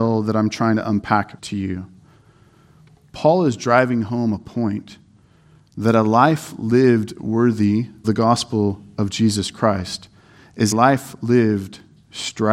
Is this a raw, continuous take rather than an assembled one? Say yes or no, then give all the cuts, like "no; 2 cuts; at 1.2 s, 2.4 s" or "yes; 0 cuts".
no; 3 cuts; at 1.4 s, 8.0 s, 10.7 s